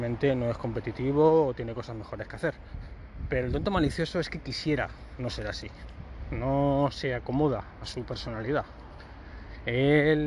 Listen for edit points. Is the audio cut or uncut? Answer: uncut